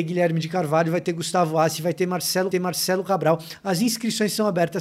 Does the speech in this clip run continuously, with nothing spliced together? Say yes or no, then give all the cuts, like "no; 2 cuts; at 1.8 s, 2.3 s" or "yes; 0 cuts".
no; 1 cut; at 2.5 s